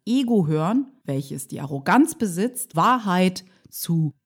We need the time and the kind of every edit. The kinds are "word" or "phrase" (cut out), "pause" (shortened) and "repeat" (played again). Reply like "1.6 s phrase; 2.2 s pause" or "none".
2.7 s phrase